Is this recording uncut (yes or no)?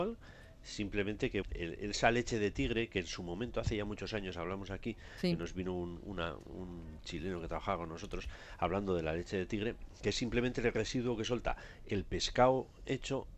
no